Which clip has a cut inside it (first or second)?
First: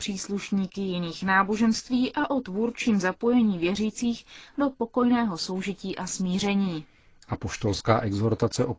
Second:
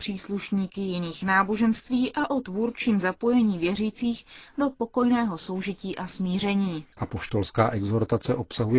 second